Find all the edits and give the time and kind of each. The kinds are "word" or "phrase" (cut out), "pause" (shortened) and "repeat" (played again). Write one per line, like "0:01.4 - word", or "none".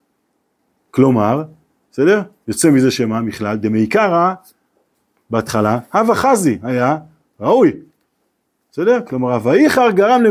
none